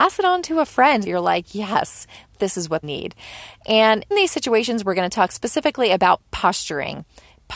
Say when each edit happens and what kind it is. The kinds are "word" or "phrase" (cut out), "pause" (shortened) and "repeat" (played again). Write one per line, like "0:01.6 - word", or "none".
0:01.1 - word
0:02.8 - word
0:04.1 - word